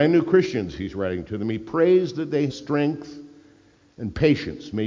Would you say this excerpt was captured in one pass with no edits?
no; 1 cut; at 2.5 s

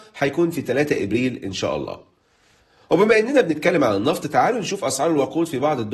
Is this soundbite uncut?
yes; 0 cuts

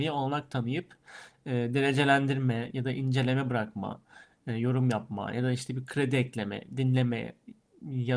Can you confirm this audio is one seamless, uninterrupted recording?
yes; 0 cuts

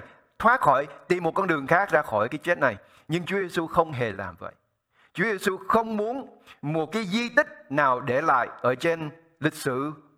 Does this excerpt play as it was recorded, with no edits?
yes; 0 cuts

